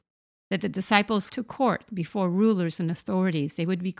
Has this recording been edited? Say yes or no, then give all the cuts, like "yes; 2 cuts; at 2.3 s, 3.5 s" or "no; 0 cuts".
yes; 1 cut; at 1.3 s